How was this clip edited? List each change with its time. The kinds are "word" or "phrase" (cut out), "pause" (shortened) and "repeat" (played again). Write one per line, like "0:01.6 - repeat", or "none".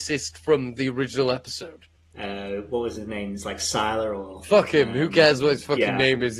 0:02.0 - pause